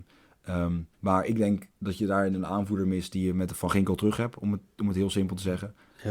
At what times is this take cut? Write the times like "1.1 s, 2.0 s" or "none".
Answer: 0.9 s, 1.8 s